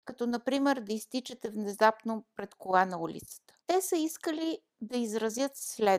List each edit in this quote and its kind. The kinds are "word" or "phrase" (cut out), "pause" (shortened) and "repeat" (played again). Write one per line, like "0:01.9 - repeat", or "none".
0:03.6 - pause